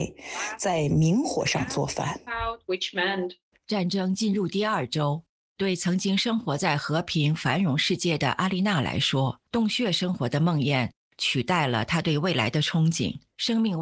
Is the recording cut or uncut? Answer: cut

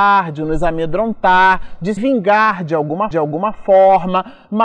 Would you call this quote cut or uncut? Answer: cut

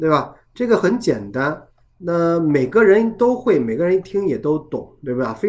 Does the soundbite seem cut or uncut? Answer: uncut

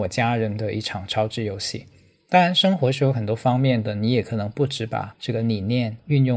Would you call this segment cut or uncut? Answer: uncut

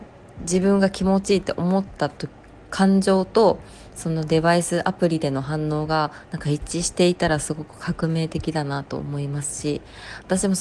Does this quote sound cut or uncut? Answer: uncut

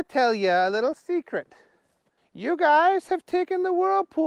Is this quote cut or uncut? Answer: uncut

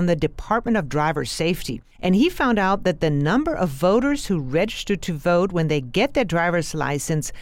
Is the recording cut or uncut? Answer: cut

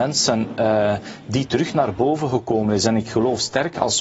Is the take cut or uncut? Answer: uncut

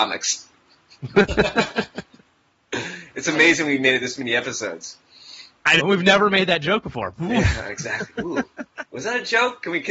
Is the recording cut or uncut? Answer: cut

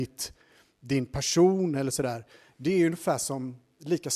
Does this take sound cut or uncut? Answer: uncut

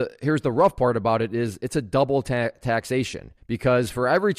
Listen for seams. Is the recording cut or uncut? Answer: cut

